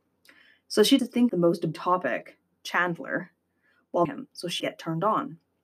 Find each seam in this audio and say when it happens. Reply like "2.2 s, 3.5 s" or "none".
1.0 s, 1.3 s, 1.7 s, 4.0 s, 4.6 s